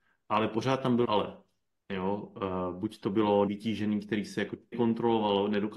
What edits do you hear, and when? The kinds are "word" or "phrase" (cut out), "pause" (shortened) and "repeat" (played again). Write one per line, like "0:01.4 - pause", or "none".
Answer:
0:01.0 - word
0:03.5 - word
0:04.7 - word